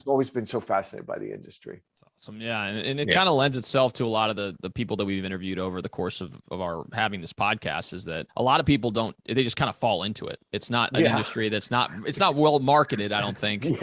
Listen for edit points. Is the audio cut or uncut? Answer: cut